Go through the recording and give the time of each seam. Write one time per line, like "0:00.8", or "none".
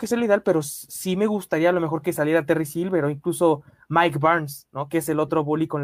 none